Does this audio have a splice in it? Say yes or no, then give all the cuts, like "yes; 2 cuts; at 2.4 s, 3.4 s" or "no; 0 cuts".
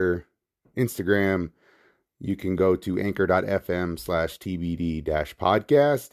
no; 0 cuts